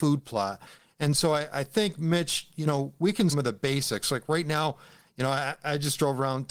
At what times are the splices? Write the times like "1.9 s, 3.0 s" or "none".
3.3 s